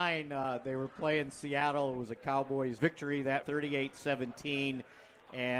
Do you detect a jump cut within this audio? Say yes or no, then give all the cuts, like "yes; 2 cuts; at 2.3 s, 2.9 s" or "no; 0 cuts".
yes; 2 cuts; at 2.8 s, 3.4 s